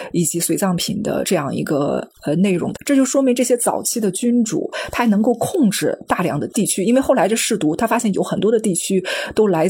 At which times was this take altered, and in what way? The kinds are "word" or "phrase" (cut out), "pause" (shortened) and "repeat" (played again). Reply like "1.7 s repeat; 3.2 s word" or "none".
2.7 s phrase